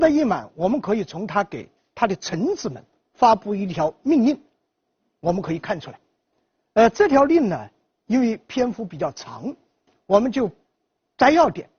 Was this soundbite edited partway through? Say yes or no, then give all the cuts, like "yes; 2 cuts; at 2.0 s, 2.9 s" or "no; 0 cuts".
no; 0 cuts